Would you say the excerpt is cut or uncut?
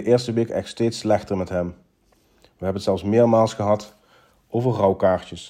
uncut